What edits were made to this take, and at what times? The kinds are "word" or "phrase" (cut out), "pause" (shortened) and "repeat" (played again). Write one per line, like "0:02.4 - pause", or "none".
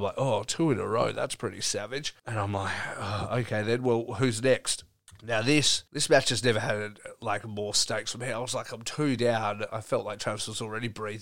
0:02.2 - pause
0:05.1 - pause
0:05.9 - pause